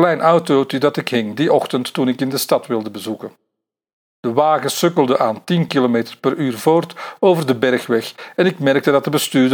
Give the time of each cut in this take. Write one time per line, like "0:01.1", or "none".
none

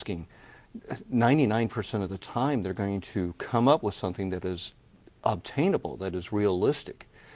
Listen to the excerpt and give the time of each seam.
none

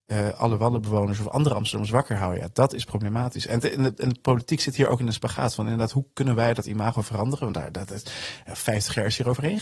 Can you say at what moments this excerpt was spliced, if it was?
none

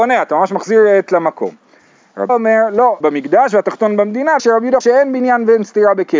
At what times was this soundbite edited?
0:01.1
0:02.3
0:03.0
0:04.4
0:04.8

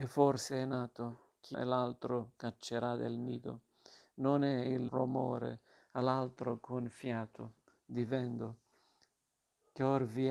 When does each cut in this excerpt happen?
0:01.5
0:04.9

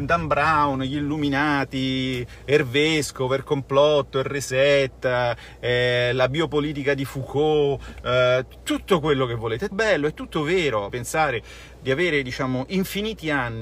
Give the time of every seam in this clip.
0:09.7
0:10.9

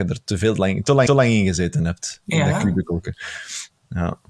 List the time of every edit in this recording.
0:01.1

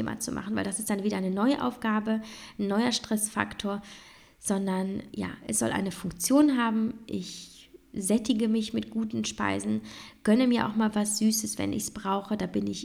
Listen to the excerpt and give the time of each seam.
0:05.1

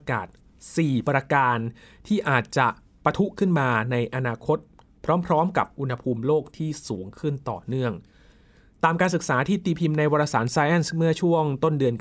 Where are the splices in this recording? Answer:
none

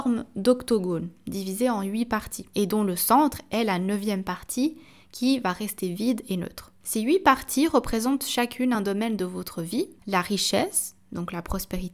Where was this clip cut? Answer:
none

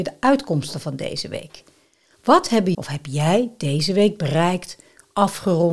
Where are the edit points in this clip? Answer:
0:02.7

